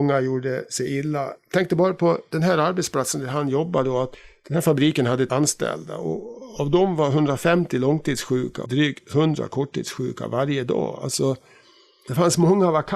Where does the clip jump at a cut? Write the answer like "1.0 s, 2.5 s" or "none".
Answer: 1.4 s, 5.3 s, 8.7 s